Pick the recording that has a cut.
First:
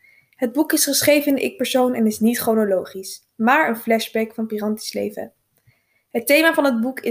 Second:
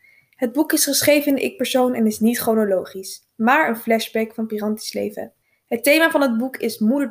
second; 1 cut; at 5.4 s

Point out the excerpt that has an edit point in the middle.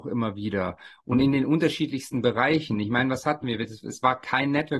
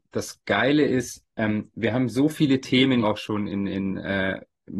second; 2 cuts; at 1.3 s, 3.0 s

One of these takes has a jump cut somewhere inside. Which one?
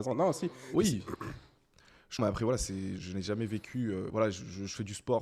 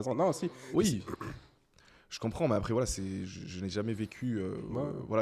first; 3 cuts; at 2.2 s, 3.0 s, 4.1 s

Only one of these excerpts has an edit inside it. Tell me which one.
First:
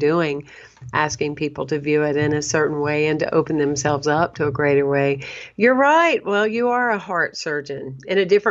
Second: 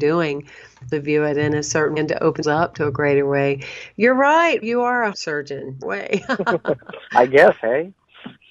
second; 6 cuts; at 0.9 s, 2.0 s, 2.4 s, 4.6 s, 5.1 s, 5.8 s

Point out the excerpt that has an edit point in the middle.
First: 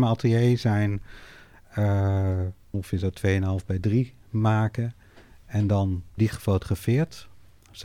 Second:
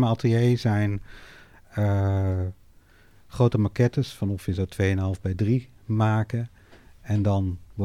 first; 2 cuts; at 2.7 s, 6.2 s

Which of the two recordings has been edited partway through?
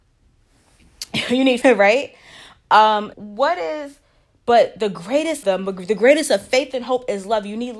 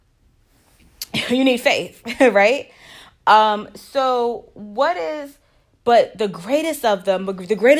first; 3 cuts; at 1.6 s, 3.1 s, 5.4 s

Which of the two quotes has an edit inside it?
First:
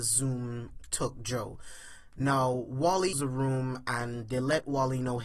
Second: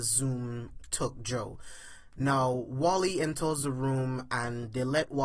first; 1 cut; at 3.1 s

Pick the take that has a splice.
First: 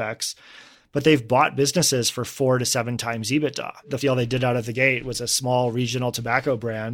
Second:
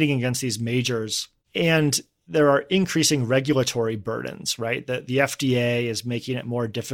first; 1 cut; at 4.0 s

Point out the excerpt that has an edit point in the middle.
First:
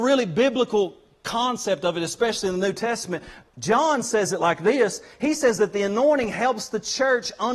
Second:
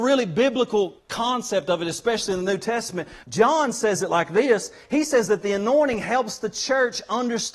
second; 2 cuts; at 1.0 s, 3.2 s

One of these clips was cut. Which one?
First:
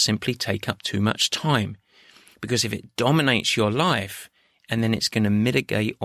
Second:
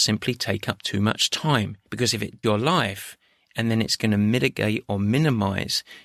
second; 2 cuts; at 1.9 s, 2.4 s

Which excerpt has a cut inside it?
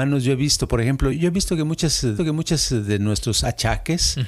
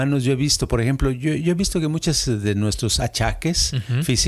first; 2 cuts; at 1.1 s, 2.2 s

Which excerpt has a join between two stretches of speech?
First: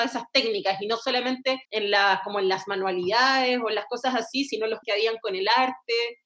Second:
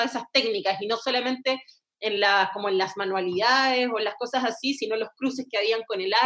first; 2 cuts; at 1.6 s, 4.8 s

